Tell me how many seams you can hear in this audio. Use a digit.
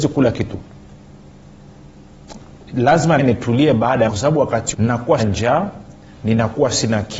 4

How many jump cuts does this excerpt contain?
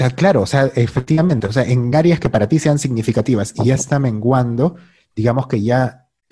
0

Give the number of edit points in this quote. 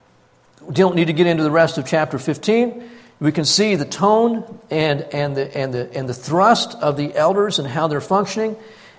0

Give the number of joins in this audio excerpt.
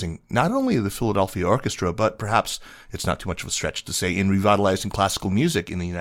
0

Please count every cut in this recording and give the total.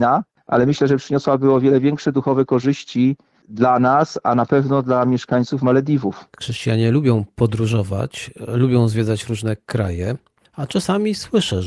1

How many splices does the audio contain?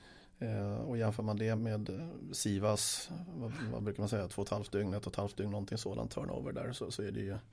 1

